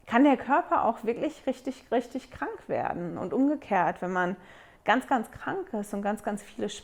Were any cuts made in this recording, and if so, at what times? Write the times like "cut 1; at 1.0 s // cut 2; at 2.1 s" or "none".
none